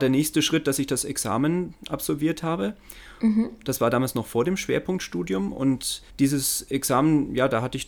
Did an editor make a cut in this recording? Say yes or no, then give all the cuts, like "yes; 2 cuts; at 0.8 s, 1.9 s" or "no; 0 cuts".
yes; 1 cut; at 6.1 s